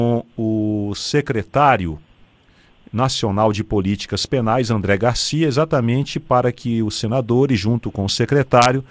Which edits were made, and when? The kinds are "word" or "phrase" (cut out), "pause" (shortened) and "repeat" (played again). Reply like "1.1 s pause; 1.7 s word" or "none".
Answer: none